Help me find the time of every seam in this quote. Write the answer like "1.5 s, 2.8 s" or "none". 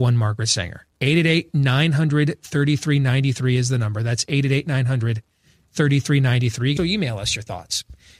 0.9 s, 6.8 s